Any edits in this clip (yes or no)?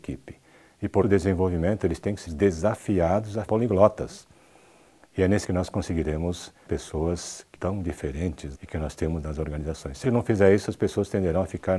yes